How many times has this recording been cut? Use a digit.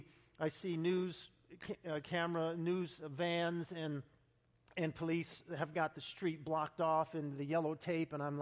0